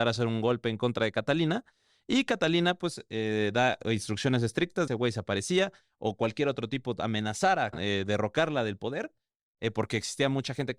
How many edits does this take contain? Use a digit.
2